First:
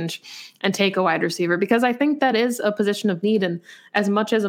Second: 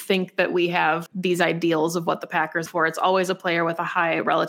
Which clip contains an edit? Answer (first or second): second